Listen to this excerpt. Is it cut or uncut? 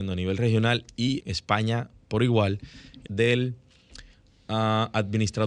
cut